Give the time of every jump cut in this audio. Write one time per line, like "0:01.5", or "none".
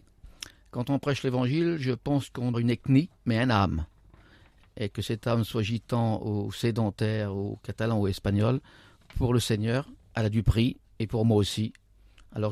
0:02.5
0:03.2